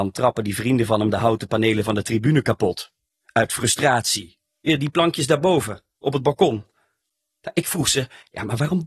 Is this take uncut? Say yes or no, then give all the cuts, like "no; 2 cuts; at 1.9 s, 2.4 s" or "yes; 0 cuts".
yes; 0 cuts